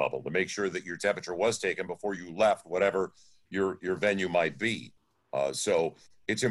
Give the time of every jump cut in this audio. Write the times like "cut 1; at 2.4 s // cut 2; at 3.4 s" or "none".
none